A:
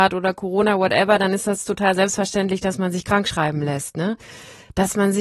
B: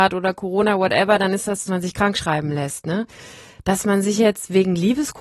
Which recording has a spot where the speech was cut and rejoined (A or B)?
B